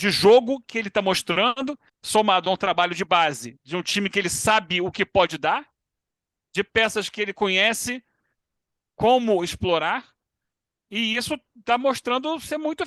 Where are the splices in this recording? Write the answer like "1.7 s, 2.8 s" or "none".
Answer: 1.9 s

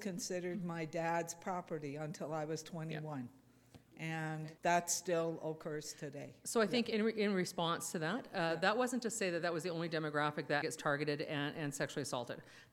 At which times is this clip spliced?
4.6 s, 10.6 s

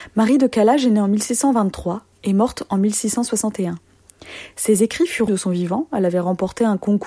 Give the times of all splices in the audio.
5.3 s

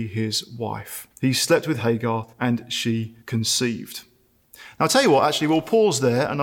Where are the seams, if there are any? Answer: 1.1 s, 2.3 s, 3.2 s

